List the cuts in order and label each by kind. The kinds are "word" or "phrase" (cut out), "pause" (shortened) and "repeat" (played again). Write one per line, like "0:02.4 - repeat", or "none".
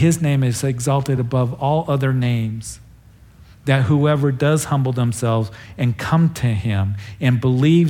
none